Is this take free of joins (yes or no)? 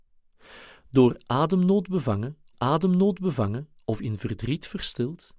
no